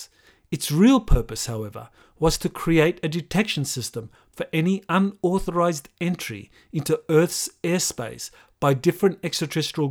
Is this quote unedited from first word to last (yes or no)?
yes